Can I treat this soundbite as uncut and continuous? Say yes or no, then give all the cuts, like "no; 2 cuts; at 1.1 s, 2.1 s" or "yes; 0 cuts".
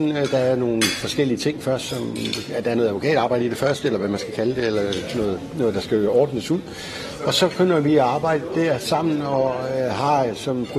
yes; 0 cuts